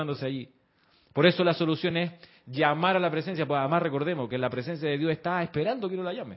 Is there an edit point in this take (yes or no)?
no